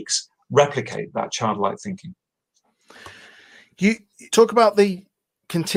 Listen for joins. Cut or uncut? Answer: cut